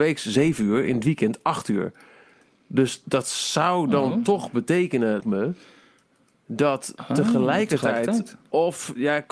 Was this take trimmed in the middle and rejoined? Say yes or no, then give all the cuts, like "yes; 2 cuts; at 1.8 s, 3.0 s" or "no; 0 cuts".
yes; 1 cut; at 5.2 s